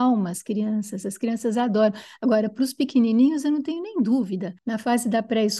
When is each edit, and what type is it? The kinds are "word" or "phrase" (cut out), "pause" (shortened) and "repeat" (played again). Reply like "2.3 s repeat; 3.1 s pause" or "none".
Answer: none